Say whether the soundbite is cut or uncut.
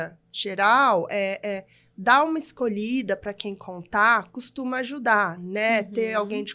uncut